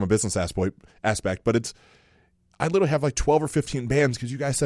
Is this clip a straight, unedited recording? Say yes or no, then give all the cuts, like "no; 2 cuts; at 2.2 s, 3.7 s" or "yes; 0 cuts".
yes; 0 cuts